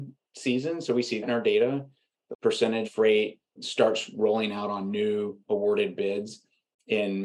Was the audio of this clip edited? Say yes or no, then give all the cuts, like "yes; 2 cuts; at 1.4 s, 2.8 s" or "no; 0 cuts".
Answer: yes; 4 cuts; at 1.2 s, 2.3 s, 2.8 s, 3.6 s